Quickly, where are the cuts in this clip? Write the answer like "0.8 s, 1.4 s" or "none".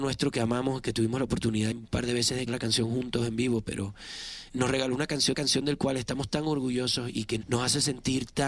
1.7 s, 2.5 s, 4.5 s, 5.3 s, 7.4 s

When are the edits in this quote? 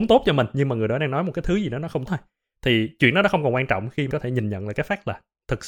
2.1 s, 4.1 s

